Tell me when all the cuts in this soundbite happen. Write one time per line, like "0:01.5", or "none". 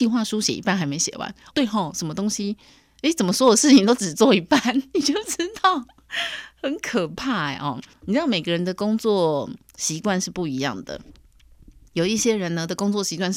0:01.5
0:07.9